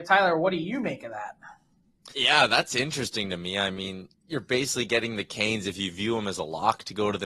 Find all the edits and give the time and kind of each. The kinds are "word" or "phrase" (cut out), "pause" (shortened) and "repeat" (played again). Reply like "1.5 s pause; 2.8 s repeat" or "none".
2.1 s pause